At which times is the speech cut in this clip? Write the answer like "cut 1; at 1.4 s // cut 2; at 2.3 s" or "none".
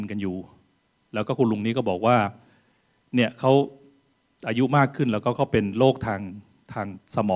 none

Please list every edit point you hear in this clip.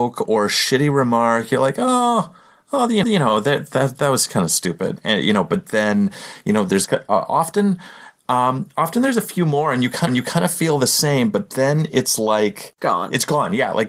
cut 1; at 3.0 s // cut 2; at 10.1 s

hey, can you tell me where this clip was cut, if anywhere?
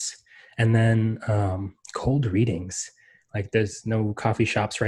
none

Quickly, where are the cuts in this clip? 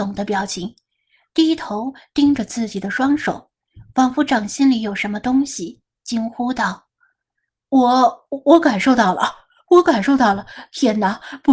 none

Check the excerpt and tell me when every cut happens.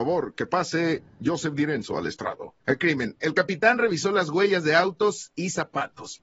cut 1; at 2.6 s

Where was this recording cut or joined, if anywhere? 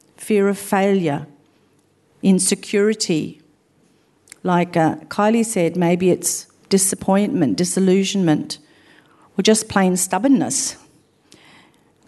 none

